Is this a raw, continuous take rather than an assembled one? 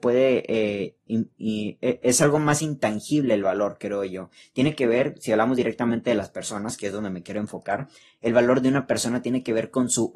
yes; 0 cuts

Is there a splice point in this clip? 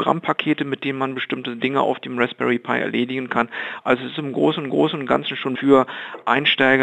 yes; 2 cuts; at 4.7 s, 5.5 s

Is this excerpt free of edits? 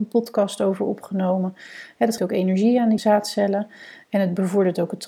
no; 2 cuts; at 2.2 s, 3.0 s

